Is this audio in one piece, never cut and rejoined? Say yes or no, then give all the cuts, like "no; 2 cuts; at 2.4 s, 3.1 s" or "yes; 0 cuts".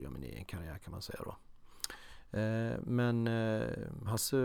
yes; 0 cuts